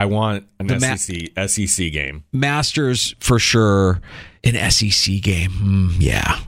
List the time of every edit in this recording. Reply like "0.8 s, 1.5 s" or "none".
4.4 s